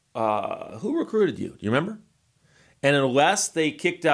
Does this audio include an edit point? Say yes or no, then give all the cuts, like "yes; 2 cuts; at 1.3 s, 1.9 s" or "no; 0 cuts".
no; 0 cuts